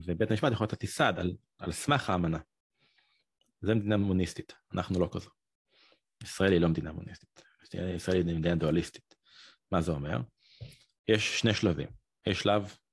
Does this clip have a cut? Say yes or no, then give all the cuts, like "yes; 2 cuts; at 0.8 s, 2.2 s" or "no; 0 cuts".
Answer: no; 0 cuts